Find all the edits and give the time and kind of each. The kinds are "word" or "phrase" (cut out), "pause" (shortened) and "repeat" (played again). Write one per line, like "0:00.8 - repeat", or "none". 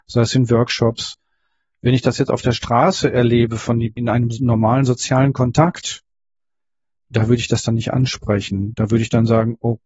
0:04.0 - word